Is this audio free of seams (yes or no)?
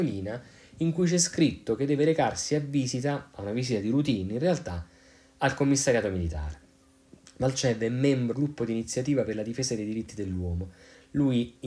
no